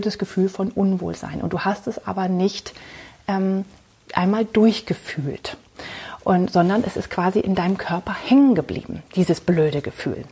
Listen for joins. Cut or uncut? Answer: uncut